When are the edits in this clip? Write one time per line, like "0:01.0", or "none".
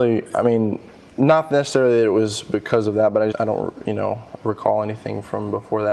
0:03.3